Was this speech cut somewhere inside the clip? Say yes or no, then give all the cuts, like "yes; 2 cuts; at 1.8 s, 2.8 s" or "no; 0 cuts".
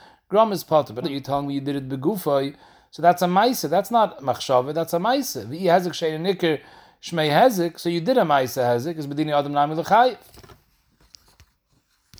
yes; 1 cut; at 1.0 s